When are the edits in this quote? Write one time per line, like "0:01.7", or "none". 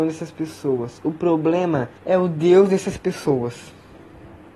0:02.0